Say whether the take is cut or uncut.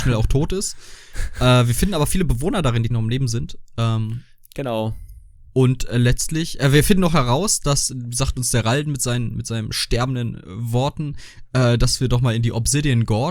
cut